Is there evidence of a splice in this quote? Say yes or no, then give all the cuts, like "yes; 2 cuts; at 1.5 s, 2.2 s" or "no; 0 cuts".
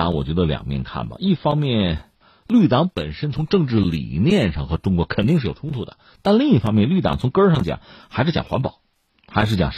no; 0 cuts